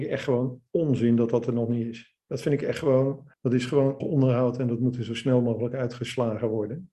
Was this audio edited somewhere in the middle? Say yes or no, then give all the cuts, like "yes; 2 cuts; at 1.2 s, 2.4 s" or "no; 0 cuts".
yes; 2 cuts; at 3.3 s, 4.0 s